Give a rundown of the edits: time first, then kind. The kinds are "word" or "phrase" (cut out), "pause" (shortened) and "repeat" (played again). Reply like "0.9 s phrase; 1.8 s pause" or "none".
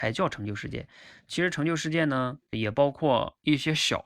2.5 s word